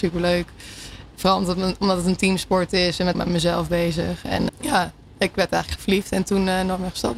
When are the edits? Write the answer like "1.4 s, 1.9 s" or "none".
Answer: 3.1 s, 4.5 s, 5.8 s